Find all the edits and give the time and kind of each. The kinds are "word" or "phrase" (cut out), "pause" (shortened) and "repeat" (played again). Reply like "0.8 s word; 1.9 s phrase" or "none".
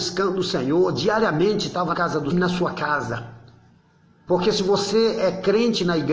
1.9 s word; 2.3 s phrase